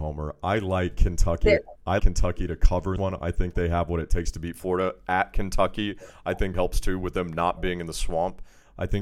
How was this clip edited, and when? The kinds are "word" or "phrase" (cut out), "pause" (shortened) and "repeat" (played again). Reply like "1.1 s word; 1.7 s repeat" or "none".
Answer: 2.0 s word; 3.0 s phrase; 6.5 s word